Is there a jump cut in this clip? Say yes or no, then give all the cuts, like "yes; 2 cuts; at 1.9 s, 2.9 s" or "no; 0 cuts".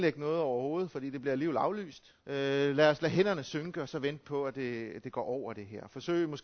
yes; 1 cut; at 2.2 s